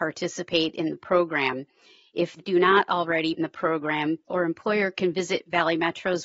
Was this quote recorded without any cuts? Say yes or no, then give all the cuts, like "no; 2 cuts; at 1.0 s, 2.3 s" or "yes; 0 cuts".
no; 3 cuts; at 2.4 s, 3.4 s, 4.3 s